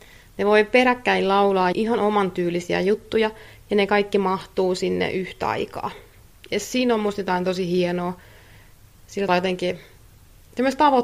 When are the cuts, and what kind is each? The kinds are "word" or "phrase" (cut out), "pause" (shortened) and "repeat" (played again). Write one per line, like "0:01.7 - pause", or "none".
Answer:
0:01.7 - word
0:09.3 - word